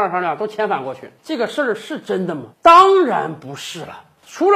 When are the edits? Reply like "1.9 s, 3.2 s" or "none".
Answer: 1.2 s, 2.5 s